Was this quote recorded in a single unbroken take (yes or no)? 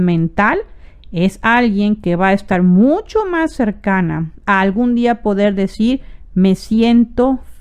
yes